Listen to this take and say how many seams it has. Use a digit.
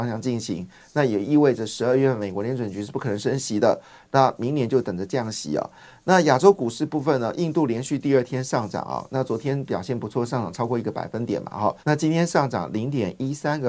1